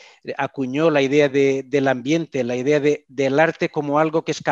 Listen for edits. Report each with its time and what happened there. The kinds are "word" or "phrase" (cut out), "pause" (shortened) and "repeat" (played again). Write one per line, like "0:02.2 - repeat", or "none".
none